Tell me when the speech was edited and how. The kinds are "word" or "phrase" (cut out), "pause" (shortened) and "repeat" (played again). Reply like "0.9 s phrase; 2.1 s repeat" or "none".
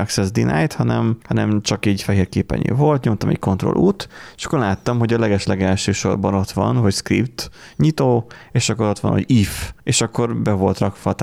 1.2 s pause; 9.8 s pause